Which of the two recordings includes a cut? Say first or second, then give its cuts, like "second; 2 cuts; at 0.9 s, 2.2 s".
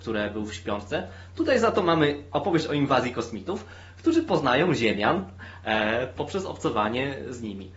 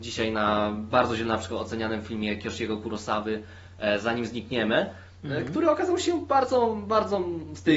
first; 1 cut; at 6.2 s